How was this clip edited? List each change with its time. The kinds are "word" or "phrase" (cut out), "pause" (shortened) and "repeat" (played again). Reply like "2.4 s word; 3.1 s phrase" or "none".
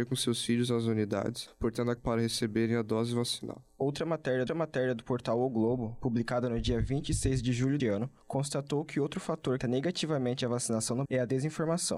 2.0 s phrase; 4.5 s repeat; 7.8 s word; 9.6 s phrase; 11.0 s word